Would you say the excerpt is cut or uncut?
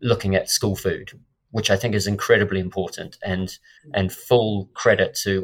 uncut